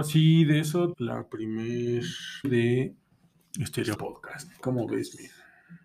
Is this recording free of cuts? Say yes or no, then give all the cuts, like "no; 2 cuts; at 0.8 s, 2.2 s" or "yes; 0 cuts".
no; 3 cuts; at 0.9 s, 2.4 s, 3.9 s